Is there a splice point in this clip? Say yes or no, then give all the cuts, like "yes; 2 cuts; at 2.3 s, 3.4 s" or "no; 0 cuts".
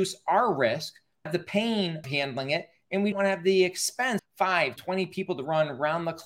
yes; 5 cuts; at 1.3 s, 2.0 s, 3.1 s, 4.2 s, 4.8 s